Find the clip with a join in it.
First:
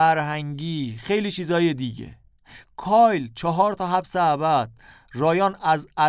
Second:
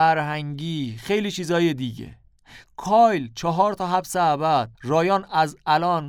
second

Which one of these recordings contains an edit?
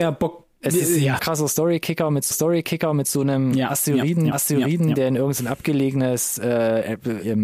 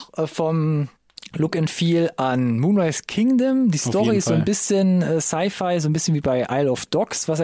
first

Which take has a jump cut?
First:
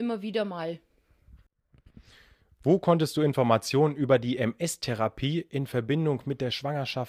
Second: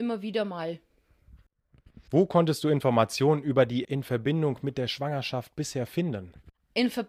second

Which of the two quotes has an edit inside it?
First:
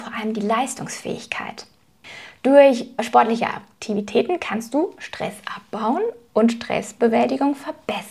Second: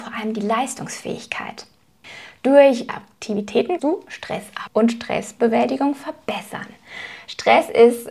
second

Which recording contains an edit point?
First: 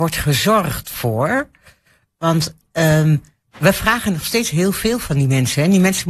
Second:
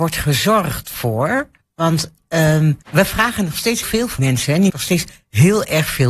second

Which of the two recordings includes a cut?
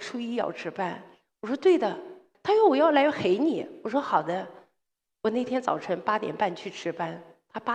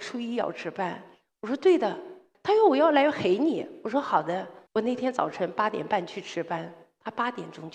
second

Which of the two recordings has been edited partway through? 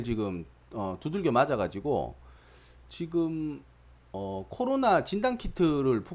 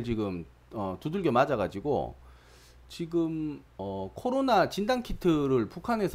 second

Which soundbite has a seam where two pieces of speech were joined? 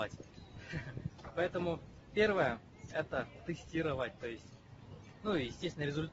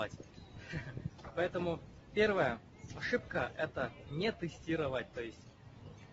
first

